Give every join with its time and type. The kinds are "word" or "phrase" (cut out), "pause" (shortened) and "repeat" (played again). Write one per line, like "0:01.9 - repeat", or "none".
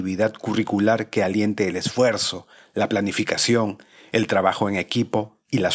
none

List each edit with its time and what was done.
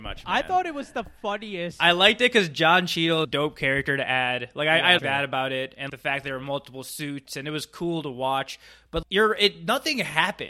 0:03.2 - word
0:05.0 - word
0:05.9 - word
0:09.0 - word

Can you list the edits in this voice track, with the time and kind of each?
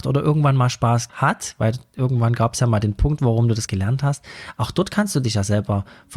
0:01.1 - word
0:03.7 - word

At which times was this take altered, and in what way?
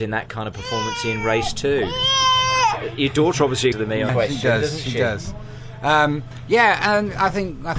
0:03.7 - word
0:04.1 - word

